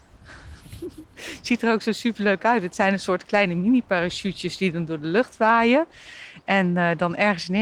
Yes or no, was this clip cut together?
no